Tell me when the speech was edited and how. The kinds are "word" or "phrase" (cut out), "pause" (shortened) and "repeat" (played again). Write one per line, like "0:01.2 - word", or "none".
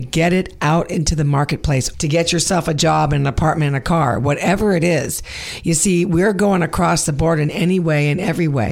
0:01.9 - word

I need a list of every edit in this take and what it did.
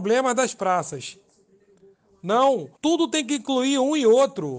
0:02.8 - pause

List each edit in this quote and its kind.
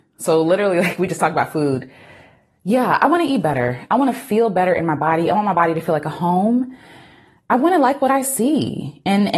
none

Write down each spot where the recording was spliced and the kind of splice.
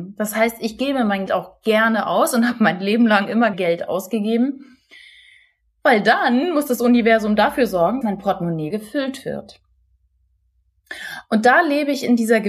0:01.3 - word
0:03.5 - word
0:08.0 - word
0:08.7 - word

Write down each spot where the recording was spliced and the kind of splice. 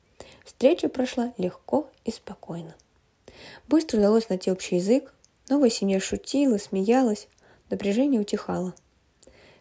none

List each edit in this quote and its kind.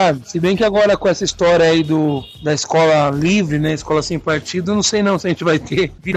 none

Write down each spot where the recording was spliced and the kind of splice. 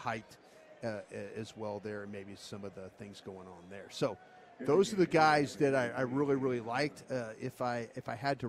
none

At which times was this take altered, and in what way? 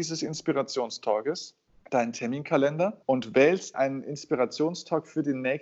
0:01.7 - pause
0:03.0 - pause
0:03.7 - word

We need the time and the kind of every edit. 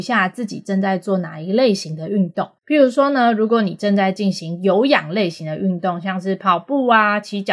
0:02.6 - pause

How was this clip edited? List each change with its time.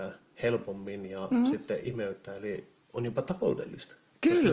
0:02.8 - phrase

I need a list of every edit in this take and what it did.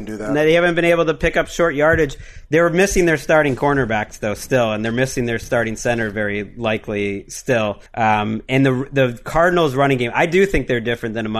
0:07.9 - pause

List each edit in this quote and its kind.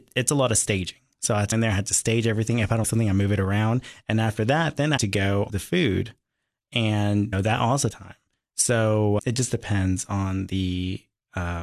0:01.5 - word
0:02.8 - word
0:05.0 - word
0:05.5 - word
0:07.3 - word
0:07.9 - word
0:09.2 - word

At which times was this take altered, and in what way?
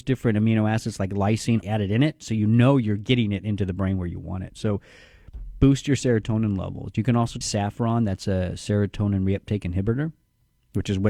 0:01.6 - word
0:07.4 - word

